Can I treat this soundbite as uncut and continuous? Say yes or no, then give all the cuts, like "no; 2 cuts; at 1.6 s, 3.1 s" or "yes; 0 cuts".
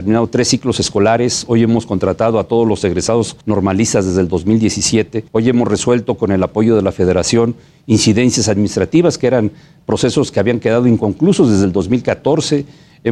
no; 2 cuts; at 3.4 s, 5.3 s